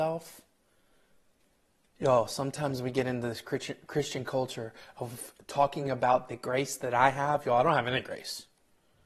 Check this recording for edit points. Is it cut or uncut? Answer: uncut